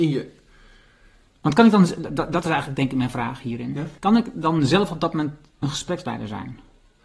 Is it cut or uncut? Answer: cut